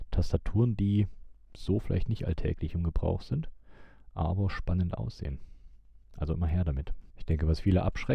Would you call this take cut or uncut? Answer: cut